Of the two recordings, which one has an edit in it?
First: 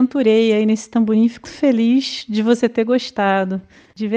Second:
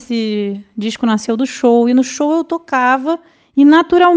first; 1 cut; at 1.4 s

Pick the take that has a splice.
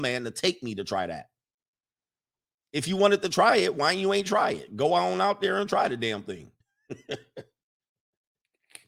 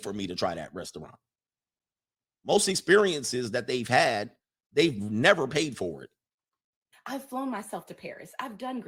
first; 1 cut; at 6.6 s

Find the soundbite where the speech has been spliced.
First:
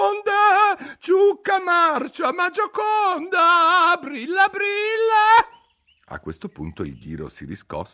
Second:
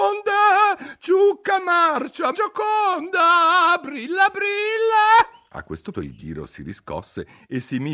second; 3 cuts; at 2.3 s, 5.5 s, 5.9 s

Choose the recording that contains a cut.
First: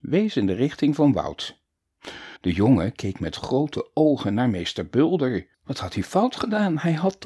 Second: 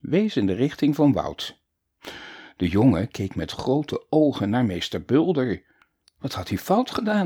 first; 2 cuts; at 2.4 s, 5.5 s

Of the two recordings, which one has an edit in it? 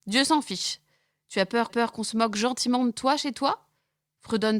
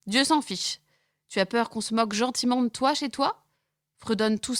first; 1 cut; at 1.7 s

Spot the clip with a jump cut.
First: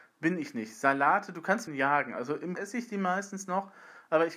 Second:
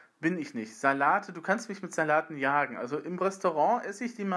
first; 2 cuts; at 1.7 s, 2.6 s

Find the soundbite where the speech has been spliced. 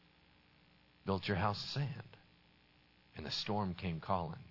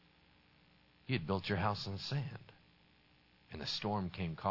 first; 2 cuts; at 1.1 s, 1.6 s

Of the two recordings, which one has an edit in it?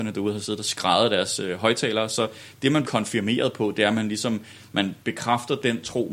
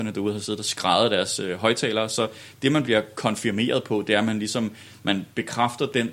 first; 1 cut; at 2.8 s

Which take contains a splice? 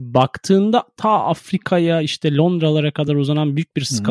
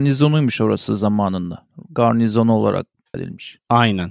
second; 1 cut; at 3.1 s

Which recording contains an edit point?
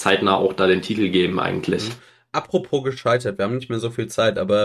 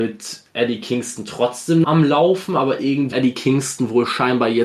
second; 2 cuts; at 1.8 s, 3.1 s

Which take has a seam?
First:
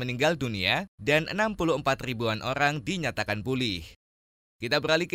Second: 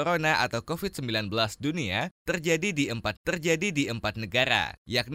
second; 1 cut; at 3.1 s

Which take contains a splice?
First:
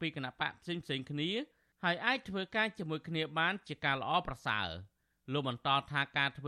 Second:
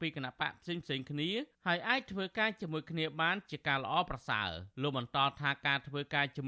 second; 2 cuts; at 1.5 s, 4.7 s

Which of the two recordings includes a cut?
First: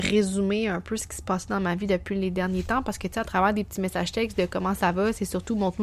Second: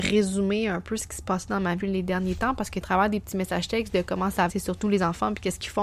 second; 4 cuts; at 1.8 s, 2.8 s, 4.5 s, 4.8 s

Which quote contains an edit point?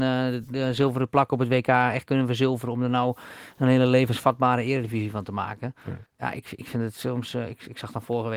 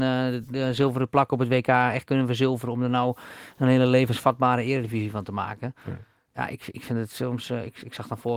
first; 1 cut; at 6.1 s

